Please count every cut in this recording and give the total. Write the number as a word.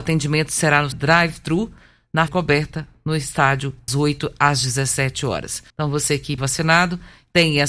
five